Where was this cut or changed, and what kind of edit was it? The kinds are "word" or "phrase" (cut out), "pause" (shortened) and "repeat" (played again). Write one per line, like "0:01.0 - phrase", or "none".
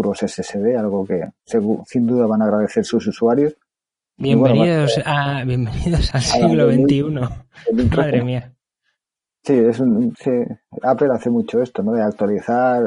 0:06.1 - word
0:10.1 - word